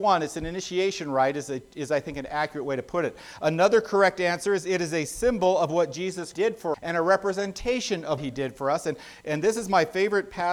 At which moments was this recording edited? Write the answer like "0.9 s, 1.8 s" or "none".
6.3 s, 6.7 s, 8.2 s